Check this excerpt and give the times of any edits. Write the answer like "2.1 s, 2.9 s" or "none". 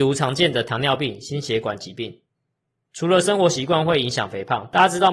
none